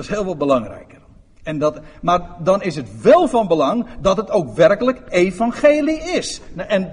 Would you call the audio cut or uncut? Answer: uncut